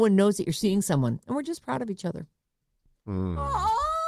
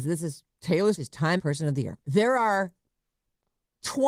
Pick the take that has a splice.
second; 3 cuts; at 0.9 s, 1.4 s, 2.0 s

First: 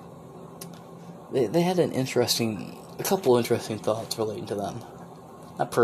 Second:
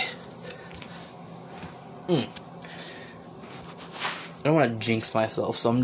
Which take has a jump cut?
second; 1 cut; at 3.4 s

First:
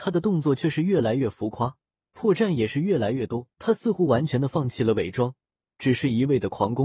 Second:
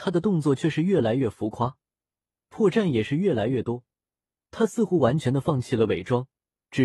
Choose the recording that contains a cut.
first; 2 cuts; at 1.9 s, 3.5 s

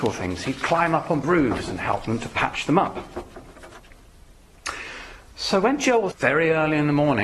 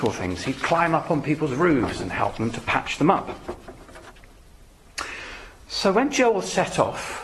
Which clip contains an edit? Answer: first; 2 cuts; at 1.2 s, 6.1 s

